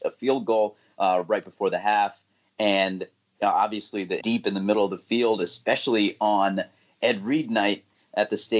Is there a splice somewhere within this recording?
yes; 1 cut; at 4.2 s

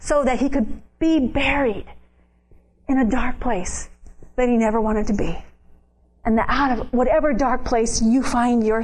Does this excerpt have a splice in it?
no; 0 cuts

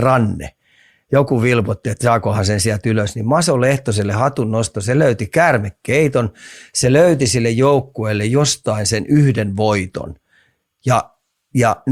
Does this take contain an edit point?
no; 0 cuts

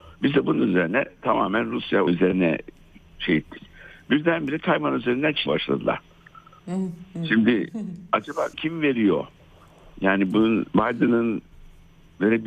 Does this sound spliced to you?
yes; 3 cuts; at 2.1 s, 5.5 s, 8.5 s

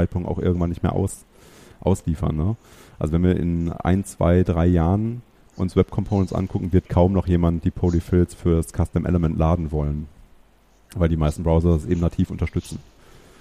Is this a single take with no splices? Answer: yes; 0 cuts

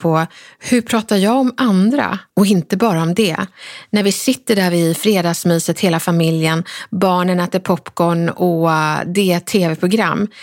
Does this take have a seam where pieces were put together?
yes; 1 cut; at 2.3 s

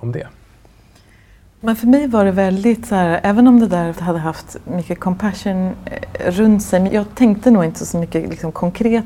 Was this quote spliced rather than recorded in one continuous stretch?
yes; 2 cuts; at 4.0 s, 6.9 s

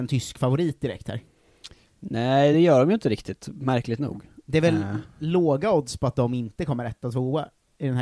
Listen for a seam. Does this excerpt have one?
no; 0 cuts

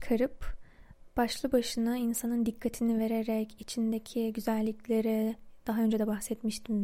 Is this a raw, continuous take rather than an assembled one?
yes; 0 cuts

